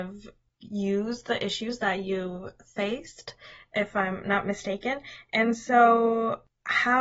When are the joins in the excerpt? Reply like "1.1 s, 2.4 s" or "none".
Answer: none